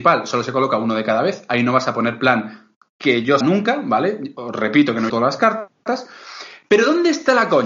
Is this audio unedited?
no; 2 cuts; at 3.4 s, 5.1 s

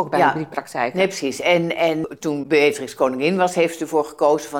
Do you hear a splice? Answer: no; 0 cuts

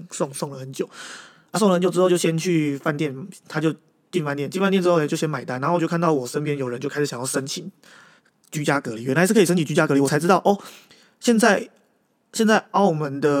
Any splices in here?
no; 0 cuts

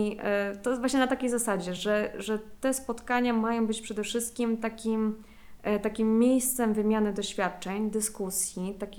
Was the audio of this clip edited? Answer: no; 0 cuts

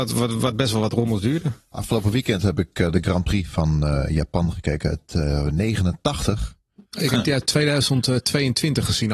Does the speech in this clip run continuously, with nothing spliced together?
yes; 0 cuts

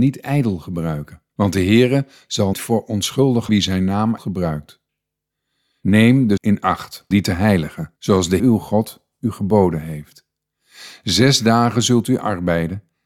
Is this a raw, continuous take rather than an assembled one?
no; 8 cuts; at 1.3 s, 2.5 s, 3.5 s, 4.2 s, 6.4 s, 7.1 s, 8.0 s, 8.4 s

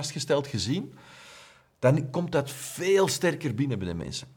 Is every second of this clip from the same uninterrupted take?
yes; 0 cuts

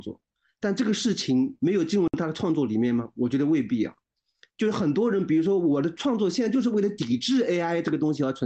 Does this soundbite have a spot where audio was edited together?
no; 0 cuts

